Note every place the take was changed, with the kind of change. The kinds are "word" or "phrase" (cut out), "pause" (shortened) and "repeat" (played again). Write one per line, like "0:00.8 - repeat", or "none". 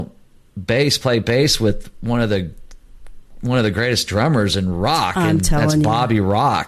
none